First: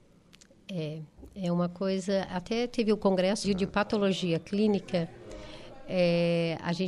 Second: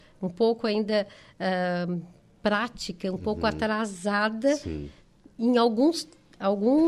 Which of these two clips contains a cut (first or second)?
first